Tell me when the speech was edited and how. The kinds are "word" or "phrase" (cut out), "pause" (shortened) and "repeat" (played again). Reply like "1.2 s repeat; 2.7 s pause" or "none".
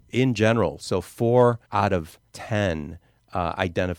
1.6 s pause; 2.3 s pause